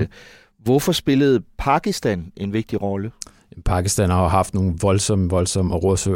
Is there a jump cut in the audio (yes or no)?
no